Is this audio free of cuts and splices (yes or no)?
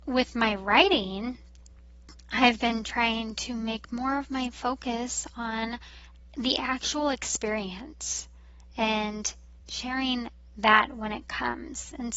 yes